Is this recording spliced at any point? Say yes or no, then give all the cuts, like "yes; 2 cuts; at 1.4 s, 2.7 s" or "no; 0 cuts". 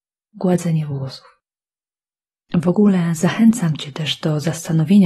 no; 0 cuts